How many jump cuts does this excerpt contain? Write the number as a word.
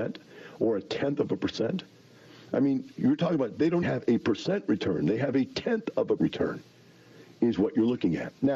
two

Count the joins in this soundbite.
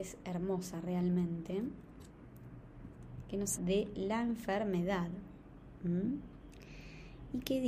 one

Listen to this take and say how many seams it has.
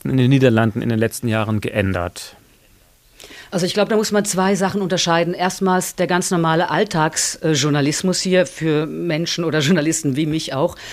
zero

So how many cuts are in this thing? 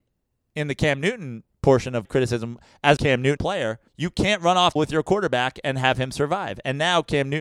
six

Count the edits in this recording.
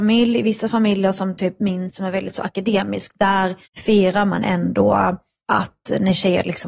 two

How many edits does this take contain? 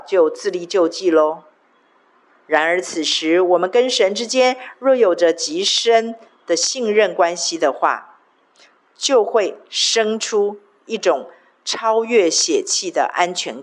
zero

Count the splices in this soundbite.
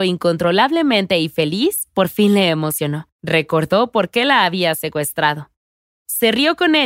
one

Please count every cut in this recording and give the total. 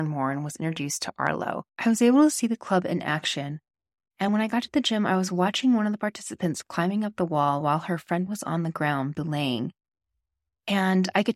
zero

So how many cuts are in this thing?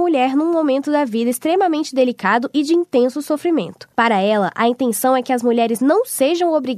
one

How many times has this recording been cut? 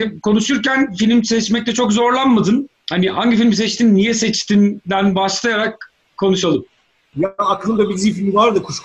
zero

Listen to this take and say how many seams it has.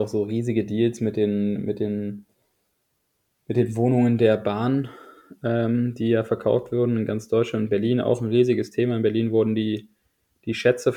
zero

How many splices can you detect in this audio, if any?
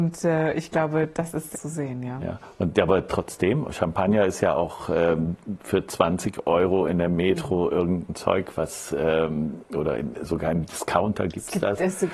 one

